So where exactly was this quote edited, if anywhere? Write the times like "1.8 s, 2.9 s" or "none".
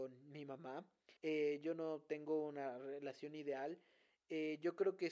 1.2 s